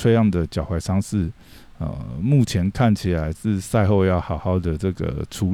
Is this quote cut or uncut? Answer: uncut